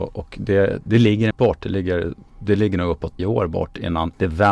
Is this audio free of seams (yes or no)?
no